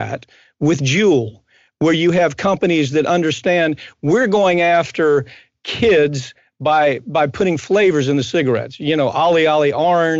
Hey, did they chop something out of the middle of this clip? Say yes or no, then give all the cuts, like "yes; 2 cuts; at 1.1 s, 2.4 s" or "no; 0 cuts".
no; 0 cuts